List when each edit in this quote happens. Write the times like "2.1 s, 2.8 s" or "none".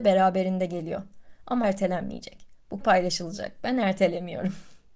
1.6 s, 2.8 s